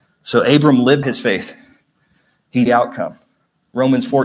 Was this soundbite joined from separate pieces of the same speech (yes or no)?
yes